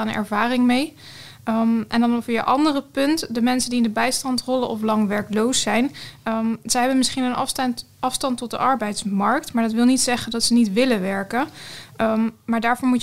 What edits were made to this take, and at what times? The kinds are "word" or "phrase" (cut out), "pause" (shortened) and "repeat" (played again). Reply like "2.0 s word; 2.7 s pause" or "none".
none

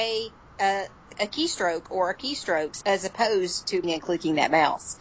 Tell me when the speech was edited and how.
1.1 s word; 2.2 s word; 3.8 s word

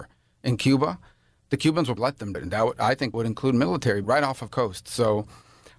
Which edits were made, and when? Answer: 2.0 s word; 2.3 s word; 3.1 s word; 4.0 s word; 4.5 s word

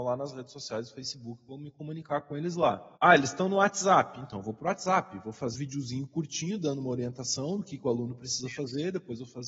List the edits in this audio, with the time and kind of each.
3.0 s pause; 5.5 s word

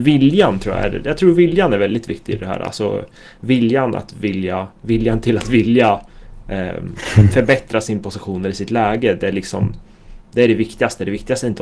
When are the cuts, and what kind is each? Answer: 4.7 s pause

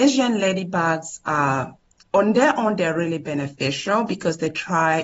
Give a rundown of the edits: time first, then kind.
none

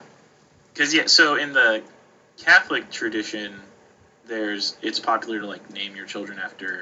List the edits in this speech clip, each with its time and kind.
none

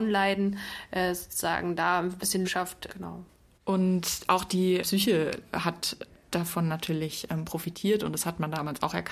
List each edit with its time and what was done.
2.4 s word; 2.9 s word; 4.8 s word

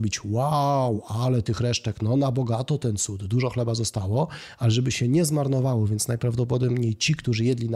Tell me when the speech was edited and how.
none

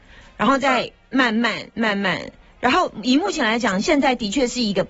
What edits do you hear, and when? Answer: none

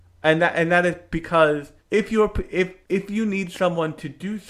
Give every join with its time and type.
1.8 s pause; 2.8 s pause

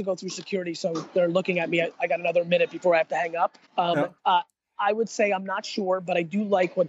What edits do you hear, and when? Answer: 3.7 s pause; 4.2 s pause

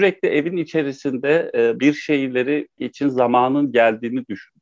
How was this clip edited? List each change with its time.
1.8 s word; 2.8 s word

